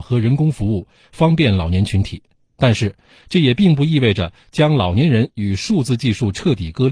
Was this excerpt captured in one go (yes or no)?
yes